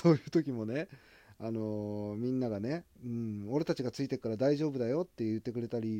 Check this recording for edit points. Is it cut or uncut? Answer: cut